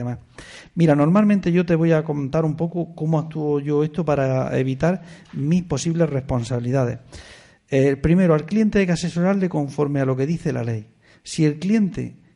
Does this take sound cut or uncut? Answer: uncut